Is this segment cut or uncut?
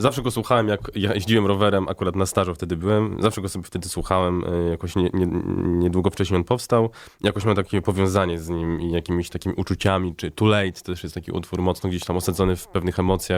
uncut